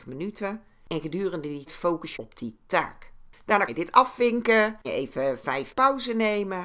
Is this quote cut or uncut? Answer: cut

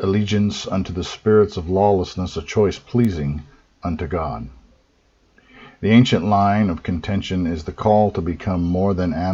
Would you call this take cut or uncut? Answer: uncut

